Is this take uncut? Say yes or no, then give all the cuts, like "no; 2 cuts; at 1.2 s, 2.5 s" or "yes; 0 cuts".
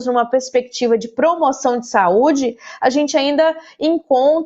yes; 0 cuts